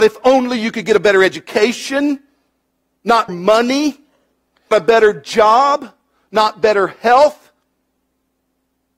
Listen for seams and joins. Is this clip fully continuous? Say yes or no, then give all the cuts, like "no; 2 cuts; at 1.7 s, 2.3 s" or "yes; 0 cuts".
no; 2 cuts; at 3.3 s, 4.7 s